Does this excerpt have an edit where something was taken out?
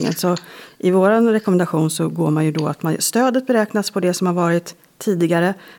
no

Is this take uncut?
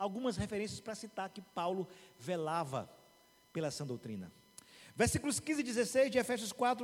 yes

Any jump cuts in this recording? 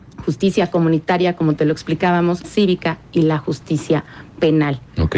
yes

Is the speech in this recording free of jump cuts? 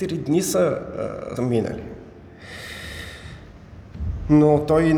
no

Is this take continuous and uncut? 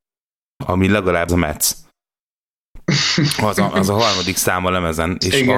no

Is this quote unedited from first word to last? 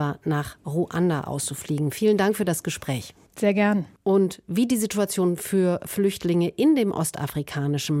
yes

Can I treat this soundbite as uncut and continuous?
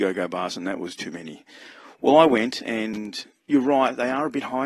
no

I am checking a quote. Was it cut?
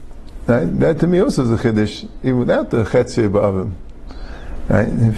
no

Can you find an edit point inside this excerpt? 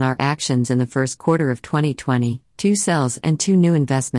no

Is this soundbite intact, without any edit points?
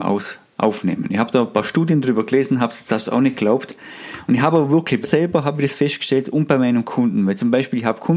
no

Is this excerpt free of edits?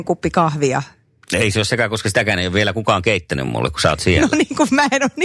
yes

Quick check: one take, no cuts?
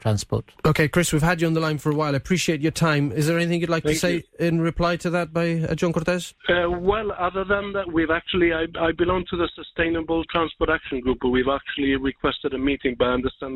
no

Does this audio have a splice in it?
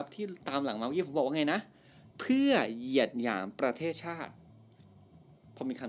yes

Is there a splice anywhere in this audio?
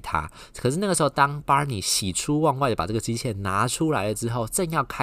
no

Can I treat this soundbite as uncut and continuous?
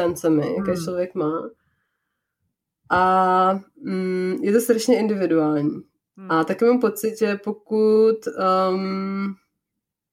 yes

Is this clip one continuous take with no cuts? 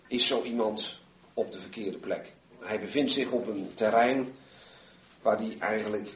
yes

